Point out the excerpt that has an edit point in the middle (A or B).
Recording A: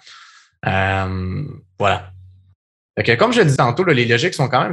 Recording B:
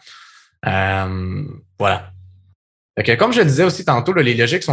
A